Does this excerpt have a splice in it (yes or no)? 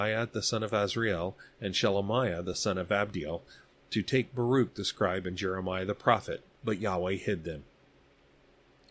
no